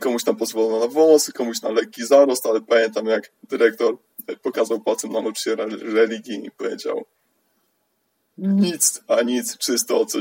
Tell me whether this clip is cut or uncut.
uncut